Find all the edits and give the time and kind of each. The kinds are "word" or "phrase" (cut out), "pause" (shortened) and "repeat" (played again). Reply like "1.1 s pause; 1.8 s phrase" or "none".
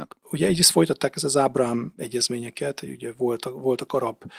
none